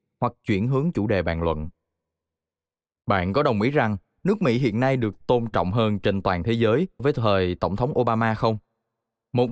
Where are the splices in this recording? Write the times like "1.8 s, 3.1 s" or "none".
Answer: 7.0 s